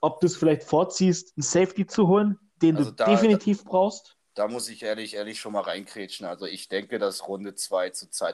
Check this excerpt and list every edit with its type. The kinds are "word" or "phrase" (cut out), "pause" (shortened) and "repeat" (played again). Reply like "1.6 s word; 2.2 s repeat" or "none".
none